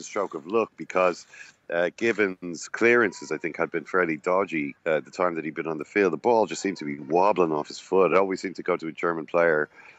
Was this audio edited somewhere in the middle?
no; 0 cuts

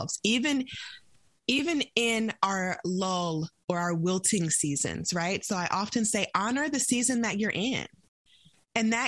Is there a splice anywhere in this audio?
no; 0 cuts

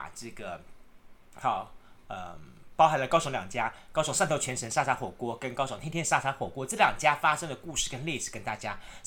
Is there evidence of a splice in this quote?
no; 0 cuts

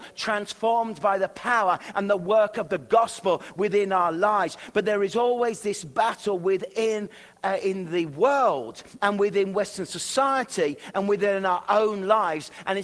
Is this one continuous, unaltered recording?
yes; 0 cuts

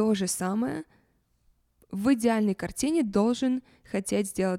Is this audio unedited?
yes; 0 cuts

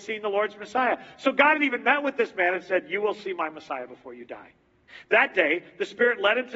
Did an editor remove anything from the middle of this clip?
no; 0 cuts

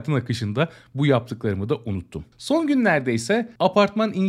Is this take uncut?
yes; 0 cuts

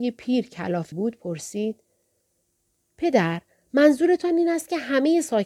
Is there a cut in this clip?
yes; 1 cut; at 0.9 s

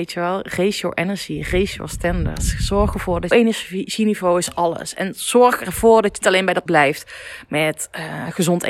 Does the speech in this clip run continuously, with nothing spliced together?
no; 3 cuts; at 3.3 s, 6.2 s, 6.7 s

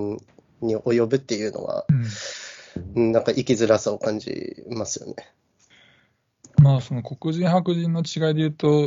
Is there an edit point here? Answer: no; 0 cuts

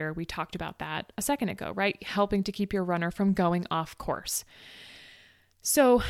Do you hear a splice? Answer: no; 0 cuts

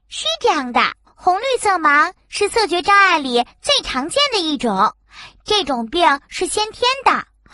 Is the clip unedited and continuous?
no; 1 cut; at 1.1 s

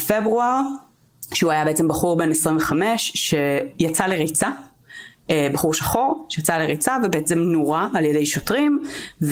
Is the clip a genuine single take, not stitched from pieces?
yes; 0 cuts

